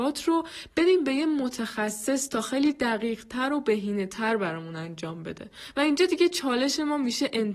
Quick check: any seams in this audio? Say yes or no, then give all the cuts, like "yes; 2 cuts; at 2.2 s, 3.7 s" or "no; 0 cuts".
no; 0 cuts